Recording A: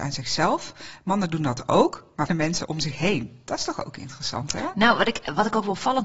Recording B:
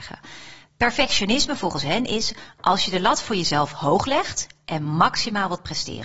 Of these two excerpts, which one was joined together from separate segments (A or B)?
A